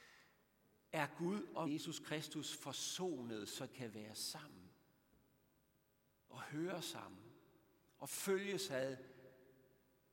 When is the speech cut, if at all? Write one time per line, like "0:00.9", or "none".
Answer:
0:01.7
0:03.7